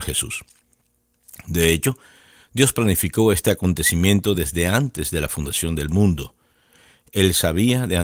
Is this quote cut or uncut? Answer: uncut